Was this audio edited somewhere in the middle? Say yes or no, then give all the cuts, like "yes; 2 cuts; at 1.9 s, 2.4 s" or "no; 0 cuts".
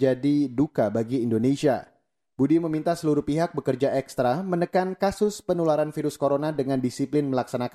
no; 0 cuts